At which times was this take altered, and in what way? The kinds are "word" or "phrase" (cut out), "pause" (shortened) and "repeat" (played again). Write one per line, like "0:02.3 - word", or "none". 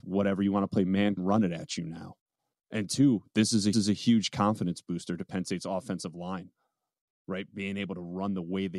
0:01.2 - phrase
0:03.7 - repeat